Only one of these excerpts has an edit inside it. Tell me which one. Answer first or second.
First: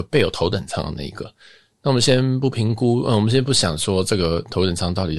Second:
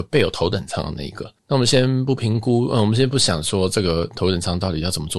second